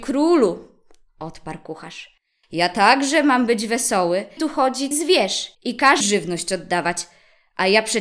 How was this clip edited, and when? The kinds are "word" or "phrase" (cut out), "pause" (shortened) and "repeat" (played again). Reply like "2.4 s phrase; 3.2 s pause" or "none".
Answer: 4.4 s word; 4.9 s word; 5.5 s pause; 6.0 s word